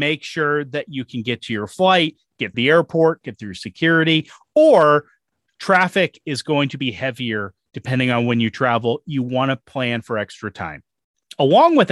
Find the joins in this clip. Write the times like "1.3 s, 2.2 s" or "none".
2.5 s